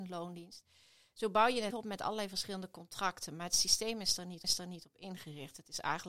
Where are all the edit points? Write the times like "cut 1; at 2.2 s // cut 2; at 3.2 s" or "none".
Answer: cut 1; at 1.7 s // cut 2; at 4.4 s